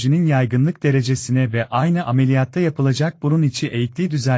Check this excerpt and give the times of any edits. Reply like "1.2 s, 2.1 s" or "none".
none

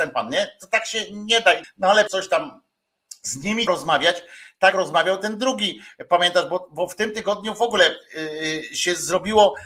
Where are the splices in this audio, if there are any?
1.6 s, 2.1 s, 3.7 s, 4.7 s

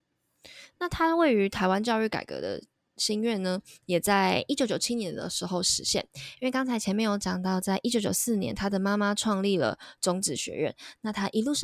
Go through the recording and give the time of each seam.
none

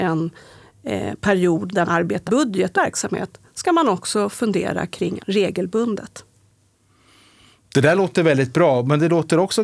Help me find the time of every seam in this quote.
1.8 s, 2.3 s, 2.7 s, 5.2 s

